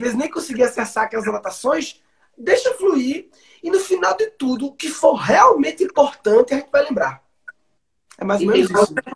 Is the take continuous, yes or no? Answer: yes